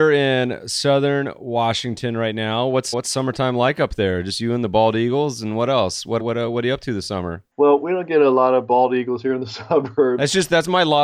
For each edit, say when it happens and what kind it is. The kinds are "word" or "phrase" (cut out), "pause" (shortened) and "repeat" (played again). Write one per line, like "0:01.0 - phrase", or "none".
0:02.9 - word
0:06.2 - word